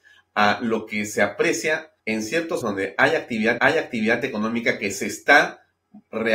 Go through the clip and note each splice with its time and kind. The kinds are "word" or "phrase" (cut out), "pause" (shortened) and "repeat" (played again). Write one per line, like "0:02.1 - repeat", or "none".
0:02.0 - pause
0:02.6 - word
0:03.6 - repeat